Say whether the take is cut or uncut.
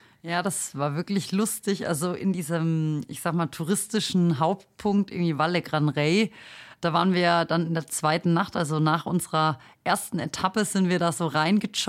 uncut